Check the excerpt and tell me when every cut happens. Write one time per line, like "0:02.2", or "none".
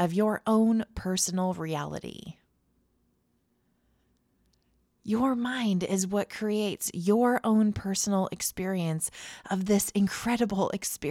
none